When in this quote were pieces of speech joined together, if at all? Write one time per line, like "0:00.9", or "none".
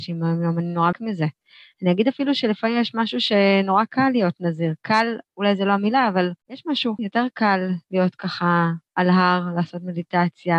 0:00.9
0:06.4
0:07.0